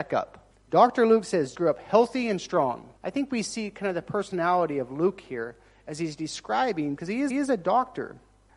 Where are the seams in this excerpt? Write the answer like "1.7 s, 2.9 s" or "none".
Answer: 1.5 s, 3.0 s, 7.0 s, 7.3 s

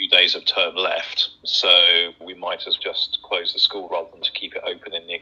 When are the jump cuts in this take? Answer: 1.4 s, 2.2 s, 2.8 s, 3.9 s, 4.2 s

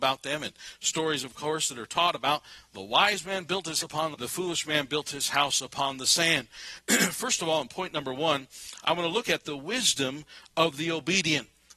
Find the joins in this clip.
3.8 s, 4.1 s

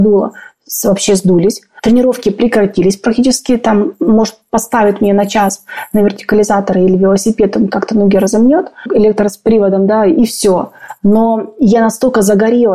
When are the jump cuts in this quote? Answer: none

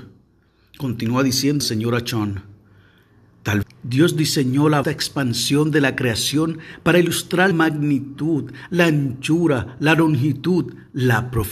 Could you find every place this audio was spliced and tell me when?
1.6 s, 3.6 s, 4.8 s, 7.5 s

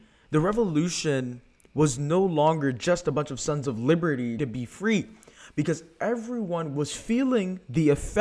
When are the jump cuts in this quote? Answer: 4.4 s

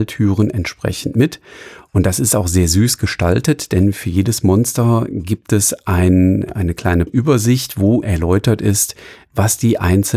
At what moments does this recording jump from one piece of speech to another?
7.1 s, 8.0 s

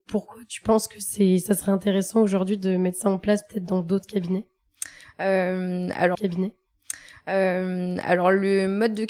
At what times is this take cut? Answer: 6.1 s

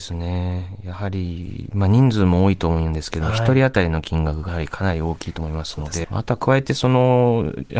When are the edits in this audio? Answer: 4.5 s, 6.0 s

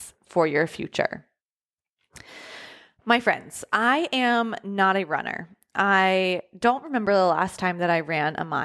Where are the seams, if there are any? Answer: none

